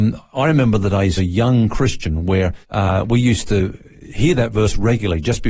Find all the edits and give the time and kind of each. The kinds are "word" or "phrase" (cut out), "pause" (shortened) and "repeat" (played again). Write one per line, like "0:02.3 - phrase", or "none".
0:01.2 - phrase
0:02.6 - pause